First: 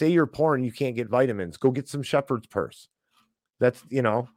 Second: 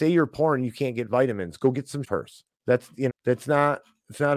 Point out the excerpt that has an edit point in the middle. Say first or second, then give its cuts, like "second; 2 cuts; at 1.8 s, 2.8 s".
second; 3 cuts; at 2.0 s, 2.5 s, 3.1 s